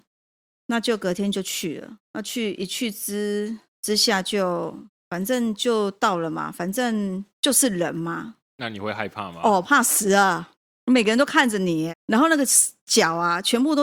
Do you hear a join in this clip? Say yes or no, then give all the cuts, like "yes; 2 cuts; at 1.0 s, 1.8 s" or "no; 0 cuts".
yes; 6 cuts; at 2.1 s, 3.7 s, 7.3 s, 8.5 s, 10.6 s, 11.9 s